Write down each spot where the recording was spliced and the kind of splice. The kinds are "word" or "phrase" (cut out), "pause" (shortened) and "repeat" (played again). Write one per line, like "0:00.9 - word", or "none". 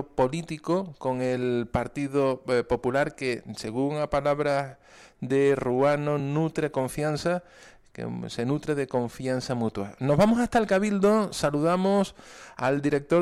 none